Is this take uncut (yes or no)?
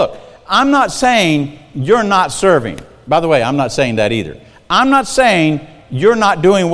yes